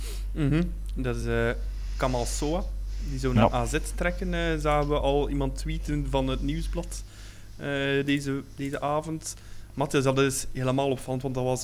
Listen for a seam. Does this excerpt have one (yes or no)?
no